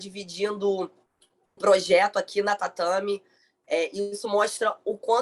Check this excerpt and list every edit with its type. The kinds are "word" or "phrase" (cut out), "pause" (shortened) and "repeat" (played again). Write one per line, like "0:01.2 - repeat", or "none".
0:01.6 - word